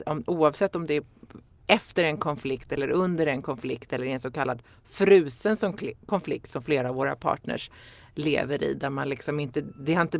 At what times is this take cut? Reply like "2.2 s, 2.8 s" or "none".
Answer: none